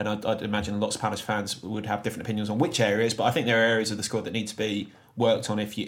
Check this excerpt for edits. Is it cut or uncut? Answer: uncut